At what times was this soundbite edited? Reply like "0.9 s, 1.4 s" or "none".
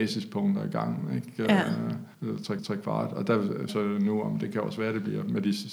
2.1 s, 2.6 s, 3.7 s